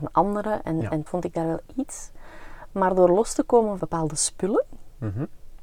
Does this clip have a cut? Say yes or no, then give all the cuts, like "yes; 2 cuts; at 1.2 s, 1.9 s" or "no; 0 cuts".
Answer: yes; 2 cuts; at 1.1 s, 3.8 s